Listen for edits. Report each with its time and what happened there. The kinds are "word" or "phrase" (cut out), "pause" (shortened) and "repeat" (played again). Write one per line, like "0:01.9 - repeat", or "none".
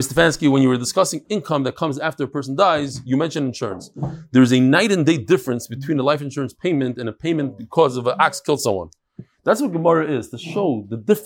none